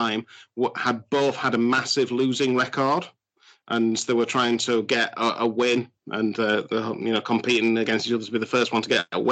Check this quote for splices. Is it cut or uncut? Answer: uncut